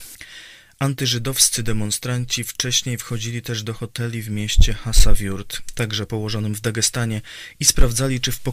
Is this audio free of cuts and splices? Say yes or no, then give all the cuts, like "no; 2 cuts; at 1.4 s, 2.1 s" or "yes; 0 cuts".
yes; 0 cuts